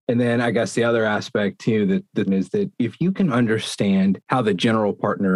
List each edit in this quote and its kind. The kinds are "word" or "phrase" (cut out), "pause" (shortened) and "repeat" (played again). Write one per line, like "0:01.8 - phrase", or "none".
0:02.3 - word

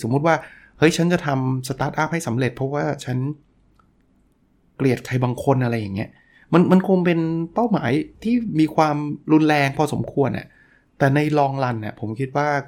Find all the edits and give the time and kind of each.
0:08.2 - pause

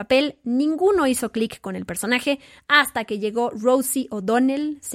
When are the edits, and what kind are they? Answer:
none

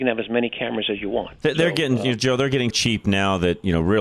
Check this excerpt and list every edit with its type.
0:01.4 - pause
0:02.7 - word

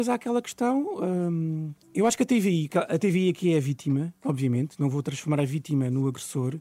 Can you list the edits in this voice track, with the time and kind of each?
0:01.8 - pause

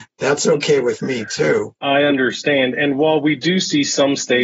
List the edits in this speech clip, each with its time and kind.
0:01.8 - pause

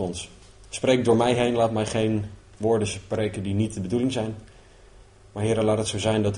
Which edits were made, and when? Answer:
none

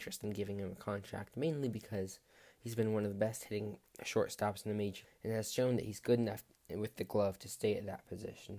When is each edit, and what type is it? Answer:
0:05.0 - word

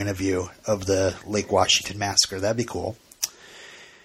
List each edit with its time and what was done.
none

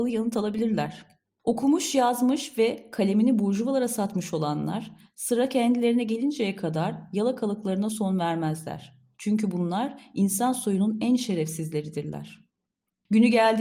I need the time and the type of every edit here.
none

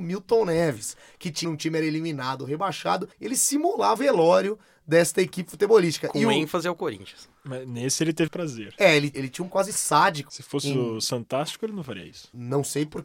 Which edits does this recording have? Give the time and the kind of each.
0:01.4 - phrase
0:03.1 - pause
0:04.0 - word
0:08.3 - word
0:09.1 - word
0:09.5 - word

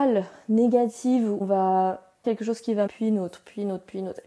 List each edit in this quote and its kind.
0:01.4 - word
0:02.2 - word
0:02.9 - word

